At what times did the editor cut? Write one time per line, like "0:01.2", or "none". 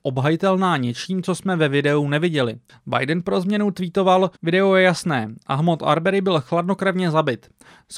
0:02.7
0:04.4